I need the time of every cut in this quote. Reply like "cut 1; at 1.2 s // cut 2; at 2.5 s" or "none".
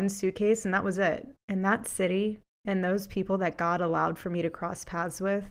cut 1; at 1.4 s